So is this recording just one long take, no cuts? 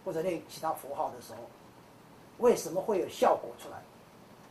yes; 0 cuts

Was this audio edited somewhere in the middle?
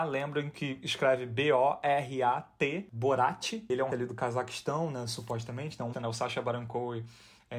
yes; 2 cuts; at 3.9 s, 5.9 s

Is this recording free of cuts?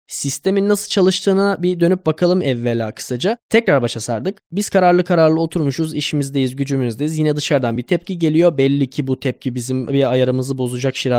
yes; 0 cuts

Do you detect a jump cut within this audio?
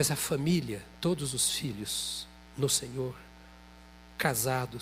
no; 0 cuts

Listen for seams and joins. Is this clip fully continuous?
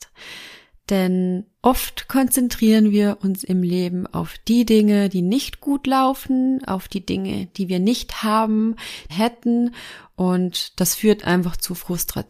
no; 2 cuts; at 1.5 s, 9.1 s

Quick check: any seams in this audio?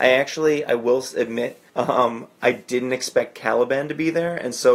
yes; 1 cut; at 1.7 s

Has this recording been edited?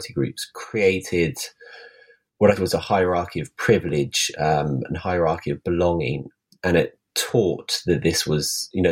yes; 1 cut; at 2.6 s

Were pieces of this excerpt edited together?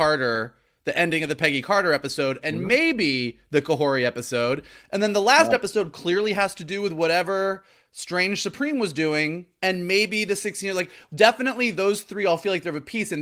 no; 0 cuts

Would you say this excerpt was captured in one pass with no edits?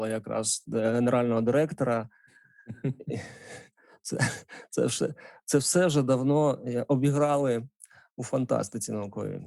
yes; 0 cuts

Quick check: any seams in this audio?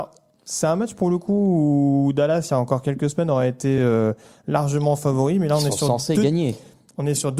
no; 0 cuts

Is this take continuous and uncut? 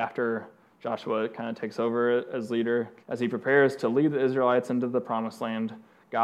no; 1 cut; at 3.0 s

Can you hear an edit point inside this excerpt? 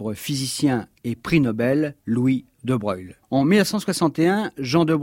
yes; 2 cuts; at 2.0 s, 3.2 s

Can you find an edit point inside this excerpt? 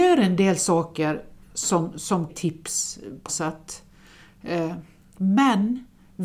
yes; 3 cuts; at 1.4 s, 2.3 s, 3.3 s

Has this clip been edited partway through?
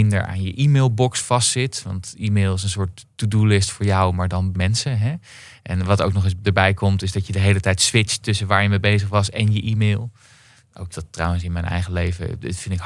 yes; 2 cuts; at 4.5 s, 10.9 s

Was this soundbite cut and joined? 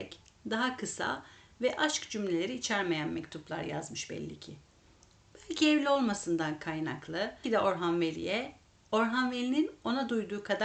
yes; 1 cut; at 7.4 s

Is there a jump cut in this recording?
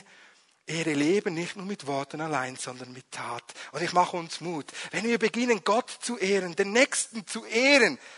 no; 0 cuts

